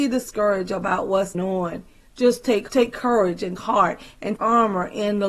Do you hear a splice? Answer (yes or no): yes